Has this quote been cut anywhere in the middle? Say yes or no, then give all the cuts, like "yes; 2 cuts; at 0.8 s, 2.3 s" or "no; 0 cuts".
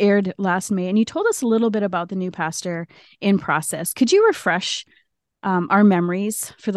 no; 0 cuts